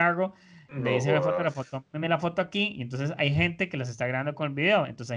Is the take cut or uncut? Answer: uncut